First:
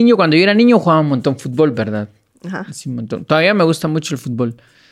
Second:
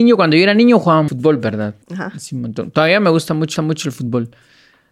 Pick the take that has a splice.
second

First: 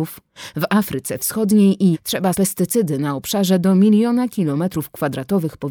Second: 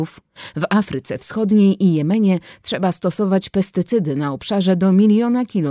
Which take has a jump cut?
first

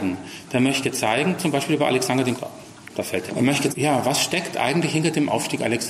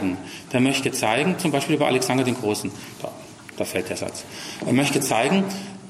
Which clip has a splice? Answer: first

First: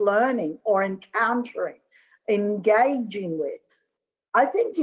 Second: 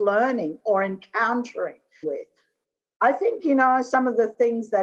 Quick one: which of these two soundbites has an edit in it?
second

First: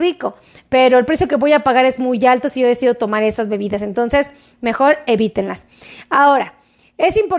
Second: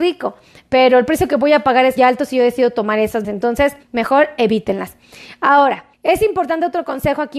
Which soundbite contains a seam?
second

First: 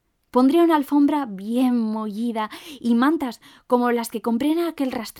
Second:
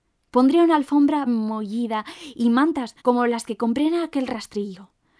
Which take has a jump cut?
second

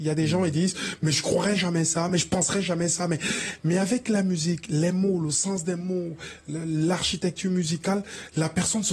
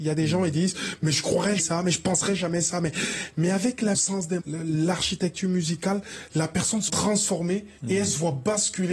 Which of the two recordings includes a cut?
second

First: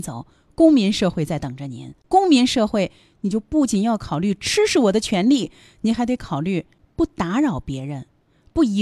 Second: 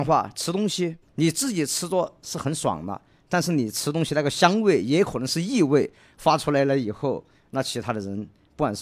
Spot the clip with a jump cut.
second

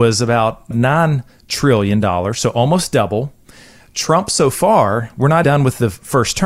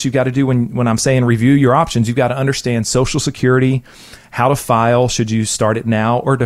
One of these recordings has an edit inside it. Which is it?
first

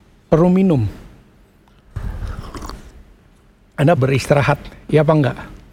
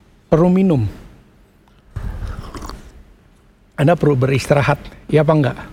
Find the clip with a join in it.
first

